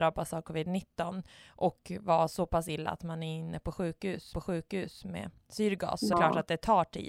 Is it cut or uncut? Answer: cut